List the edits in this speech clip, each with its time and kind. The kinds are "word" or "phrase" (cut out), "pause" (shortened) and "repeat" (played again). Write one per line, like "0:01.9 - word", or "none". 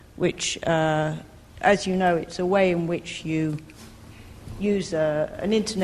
none

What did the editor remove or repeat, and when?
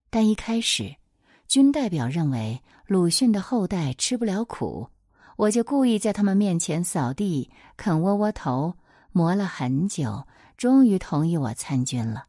none

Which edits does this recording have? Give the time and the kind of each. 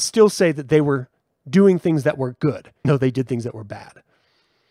0:02.8 - word

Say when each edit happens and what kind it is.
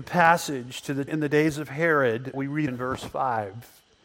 0:01.1 - word
0:02.3 - word
0:02.7 - word

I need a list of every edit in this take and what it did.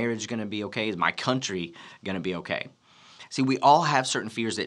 none

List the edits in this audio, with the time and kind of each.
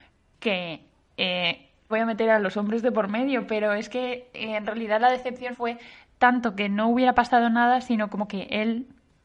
0:01.9 - word
0:05.5 - word

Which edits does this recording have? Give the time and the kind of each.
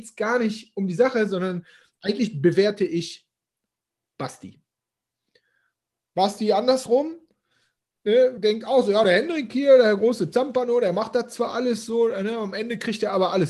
none

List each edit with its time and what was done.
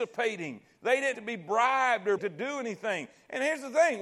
0:01.1 - word
0:02.2 - word

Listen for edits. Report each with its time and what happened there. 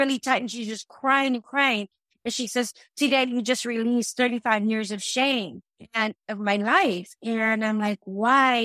none

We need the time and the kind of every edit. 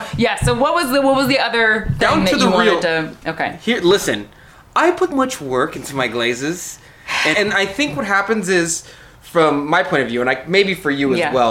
0:05.1 - word
0:07.3 - word

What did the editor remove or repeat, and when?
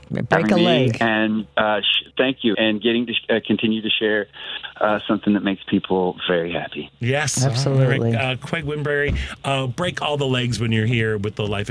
0:02.5 - word

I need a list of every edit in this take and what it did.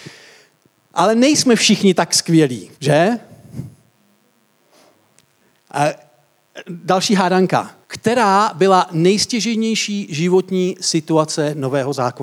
0:02.8 - pause
0:07.8 - pause

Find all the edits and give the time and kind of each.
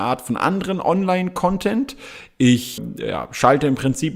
0:02.8 - word

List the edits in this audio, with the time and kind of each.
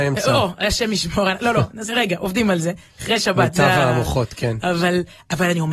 0:01.9 - word

